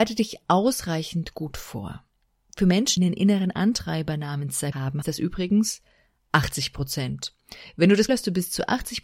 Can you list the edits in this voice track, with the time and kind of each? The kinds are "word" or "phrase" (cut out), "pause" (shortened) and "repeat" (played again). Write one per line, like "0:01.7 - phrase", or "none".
0:03.0 - word
0:04.7 - word
0:05.0 - word
0:08.1 - word